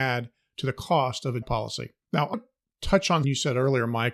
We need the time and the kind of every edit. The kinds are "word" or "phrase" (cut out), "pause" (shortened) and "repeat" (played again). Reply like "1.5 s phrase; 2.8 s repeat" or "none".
1.4 s word; 2.0 s pause; 2.3 s word; 3.2 s word